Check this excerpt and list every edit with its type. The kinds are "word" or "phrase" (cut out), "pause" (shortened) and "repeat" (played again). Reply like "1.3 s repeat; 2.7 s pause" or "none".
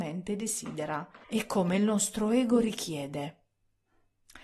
1.2 s pause